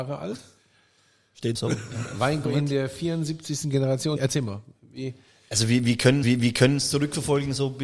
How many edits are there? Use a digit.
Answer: 4